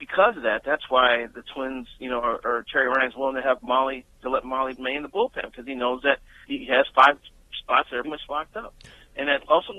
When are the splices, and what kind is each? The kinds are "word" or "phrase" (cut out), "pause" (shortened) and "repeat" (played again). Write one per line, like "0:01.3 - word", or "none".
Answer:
0:04.8 - word
0:06.5 - word
0:08.0 - word